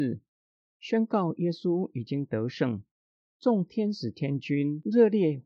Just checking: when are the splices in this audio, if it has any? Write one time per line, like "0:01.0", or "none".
none